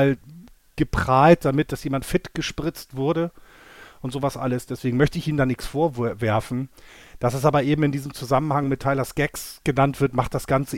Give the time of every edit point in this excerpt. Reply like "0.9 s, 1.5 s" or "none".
none